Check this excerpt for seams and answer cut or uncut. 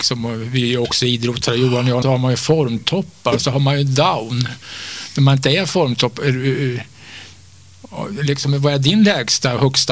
cut